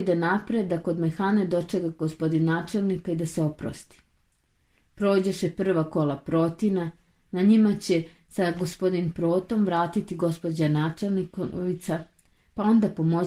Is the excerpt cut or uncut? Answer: uncut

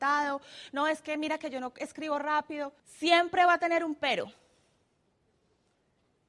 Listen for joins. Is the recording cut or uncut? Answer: cut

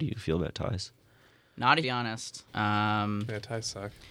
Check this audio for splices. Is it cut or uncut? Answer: cut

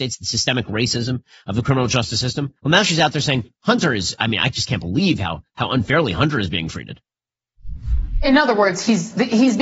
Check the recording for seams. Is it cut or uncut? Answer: cut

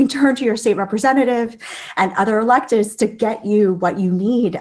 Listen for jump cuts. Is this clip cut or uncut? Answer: uncut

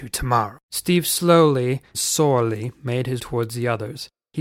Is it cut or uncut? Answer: cut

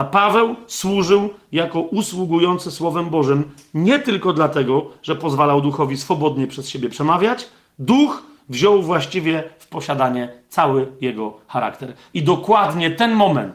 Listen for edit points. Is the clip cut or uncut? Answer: uncut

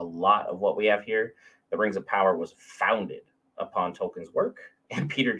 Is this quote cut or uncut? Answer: uncut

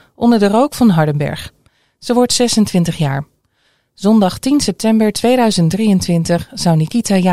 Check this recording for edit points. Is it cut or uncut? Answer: uncut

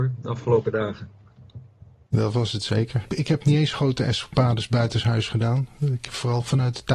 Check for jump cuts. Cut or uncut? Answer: uncut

